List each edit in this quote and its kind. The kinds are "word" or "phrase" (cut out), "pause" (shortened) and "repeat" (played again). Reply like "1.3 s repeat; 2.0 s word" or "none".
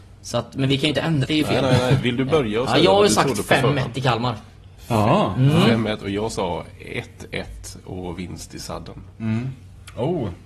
1.2 s word